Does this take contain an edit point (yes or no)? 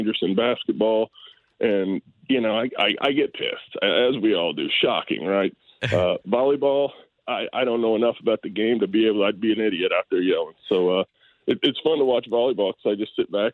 no